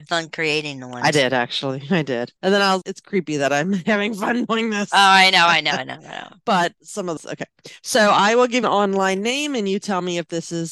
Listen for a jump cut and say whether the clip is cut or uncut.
cut